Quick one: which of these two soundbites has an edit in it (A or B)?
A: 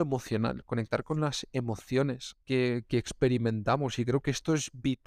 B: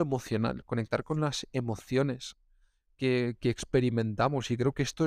A